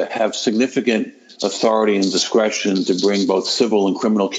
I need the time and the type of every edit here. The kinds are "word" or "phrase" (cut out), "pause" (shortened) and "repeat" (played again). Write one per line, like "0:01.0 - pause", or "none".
none